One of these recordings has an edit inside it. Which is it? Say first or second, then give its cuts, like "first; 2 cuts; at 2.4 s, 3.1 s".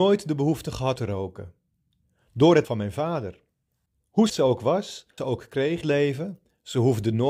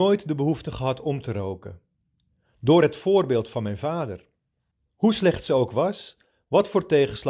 first; 5 cuts; at 1.0 s, 2.6 s, 4.3 s, 5.2 s, 5.8 s